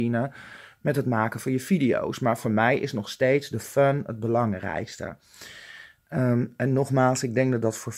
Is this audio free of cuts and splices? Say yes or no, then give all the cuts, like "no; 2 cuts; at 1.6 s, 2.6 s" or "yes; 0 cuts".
yes; 0 cuts